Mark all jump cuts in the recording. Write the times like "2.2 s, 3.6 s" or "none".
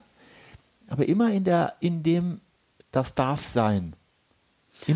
none